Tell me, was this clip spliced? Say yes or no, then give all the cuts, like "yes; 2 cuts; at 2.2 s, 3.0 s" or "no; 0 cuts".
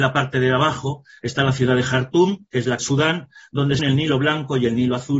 yes; 3 cuts; at 2.5 s, 2.8 s, 3.8 s